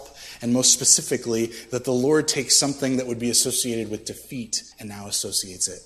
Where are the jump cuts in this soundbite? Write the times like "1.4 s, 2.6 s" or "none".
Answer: 4.7 s